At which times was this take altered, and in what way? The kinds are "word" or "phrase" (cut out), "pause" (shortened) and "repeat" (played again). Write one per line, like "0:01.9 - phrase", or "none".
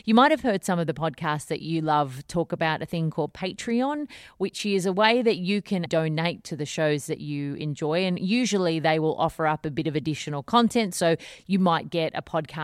0:05.9 - word